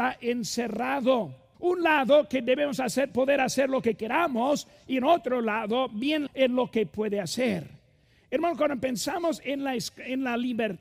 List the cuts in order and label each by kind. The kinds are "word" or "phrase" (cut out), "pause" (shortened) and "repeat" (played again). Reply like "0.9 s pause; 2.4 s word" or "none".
1.5 s pause; 6.3 s word